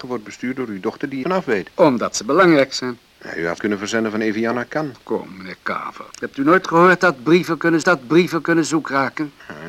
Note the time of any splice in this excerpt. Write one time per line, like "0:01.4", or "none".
0:01.2
0:03.6
0:06.1
0:07.8